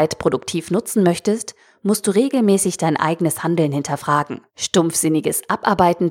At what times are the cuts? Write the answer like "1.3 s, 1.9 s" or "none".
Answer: 4.5 s